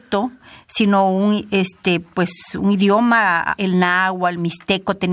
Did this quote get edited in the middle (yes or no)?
no